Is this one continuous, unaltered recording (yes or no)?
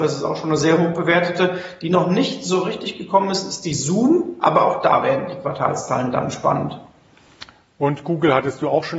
yes